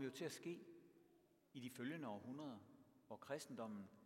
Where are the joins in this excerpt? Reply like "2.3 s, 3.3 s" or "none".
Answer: none